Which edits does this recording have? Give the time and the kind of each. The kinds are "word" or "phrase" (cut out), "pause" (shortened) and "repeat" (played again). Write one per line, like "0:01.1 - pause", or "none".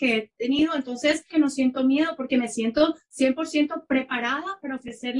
0:01.3 - phrase

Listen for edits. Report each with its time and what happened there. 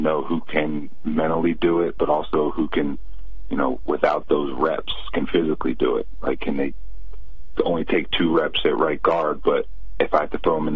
none

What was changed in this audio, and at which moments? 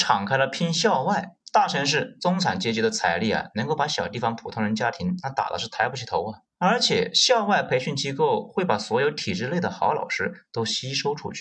0:01.4 - pause
0:06.5 - pause

